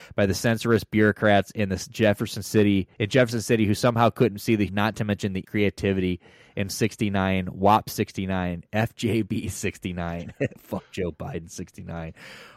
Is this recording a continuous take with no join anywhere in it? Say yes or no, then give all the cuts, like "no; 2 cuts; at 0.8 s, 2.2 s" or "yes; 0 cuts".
no; 4 cuts; at 2.9 s, 4.7 s, 5.4 s, 6.7 s